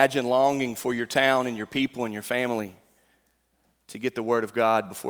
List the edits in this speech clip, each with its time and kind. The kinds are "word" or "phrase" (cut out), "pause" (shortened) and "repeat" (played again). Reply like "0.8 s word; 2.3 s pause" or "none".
none